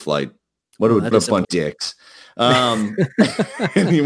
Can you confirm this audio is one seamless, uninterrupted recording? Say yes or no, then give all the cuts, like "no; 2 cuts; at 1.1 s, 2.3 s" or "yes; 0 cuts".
no; 2 cuts; at 1.1 s, 1.4 s